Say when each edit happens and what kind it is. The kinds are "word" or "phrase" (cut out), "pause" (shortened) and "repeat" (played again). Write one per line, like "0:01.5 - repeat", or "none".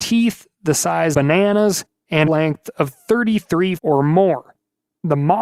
0:01.1 - word
0:02.3 - phrase
0:03.8 - word